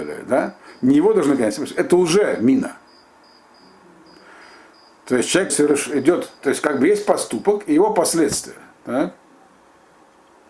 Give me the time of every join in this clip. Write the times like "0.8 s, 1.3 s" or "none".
5.5 s, 6.4 s